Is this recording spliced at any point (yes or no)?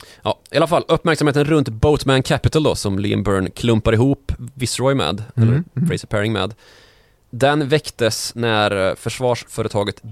no